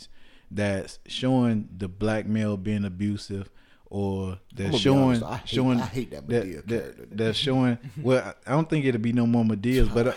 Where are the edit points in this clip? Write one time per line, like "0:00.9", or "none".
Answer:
0:07.1